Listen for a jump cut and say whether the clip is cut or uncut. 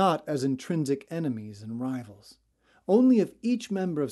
cut